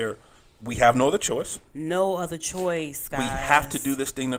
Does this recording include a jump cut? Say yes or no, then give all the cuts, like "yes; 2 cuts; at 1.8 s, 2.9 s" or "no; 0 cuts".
no; 0 cuts